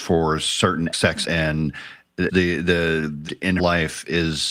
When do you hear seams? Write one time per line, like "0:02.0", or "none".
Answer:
0:00.9
0:01.2
0:02.3
0:03.3
0:03.6